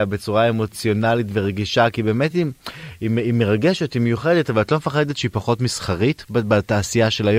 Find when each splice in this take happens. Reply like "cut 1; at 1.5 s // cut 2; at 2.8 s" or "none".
none